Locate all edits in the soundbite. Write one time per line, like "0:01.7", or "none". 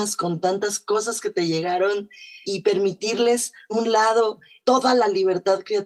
0:02.4
0:03.7
0:04.6

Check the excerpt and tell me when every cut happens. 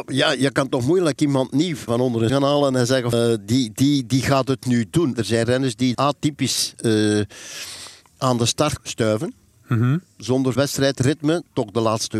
0:01.9
0:02.3
0:03.1
0:05.1
0:05.9
0:08.8
0:10.6

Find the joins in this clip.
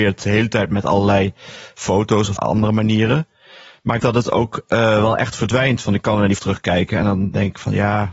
0:02.4
0:04.0
0:06.4

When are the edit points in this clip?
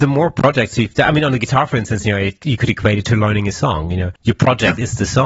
0:04.2

